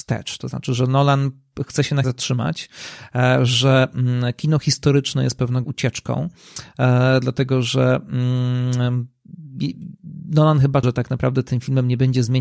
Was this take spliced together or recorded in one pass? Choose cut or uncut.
cut